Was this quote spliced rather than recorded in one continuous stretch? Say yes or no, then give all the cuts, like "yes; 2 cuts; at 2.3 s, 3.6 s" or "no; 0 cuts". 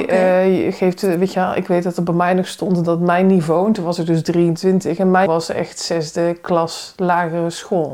yes; 1 cut; at 5.3 s